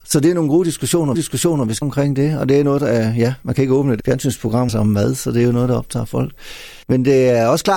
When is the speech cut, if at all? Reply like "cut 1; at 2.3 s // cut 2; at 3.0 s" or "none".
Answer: cut 1; at 1.1 s // cut 2; at 1.8 s // cut 3; at 4.0 s // cut 4; at 4.7 s // cut 5; at 6.8 s